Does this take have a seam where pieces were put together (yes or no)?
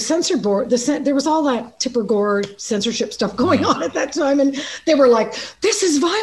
no